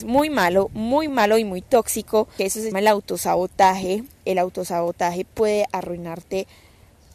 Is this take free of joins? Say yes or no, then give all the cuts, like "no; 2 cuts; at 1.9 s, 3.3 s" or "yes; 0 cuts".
no; 4 cuts; at 1.1 s, 2.4 s, 2.7 s, 4.2 s